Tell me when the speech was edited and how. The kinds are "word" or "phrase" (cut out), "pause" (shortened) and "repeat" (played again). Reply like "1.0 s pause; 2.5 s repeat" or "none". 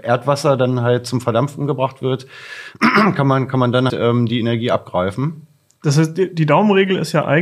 3.9 s word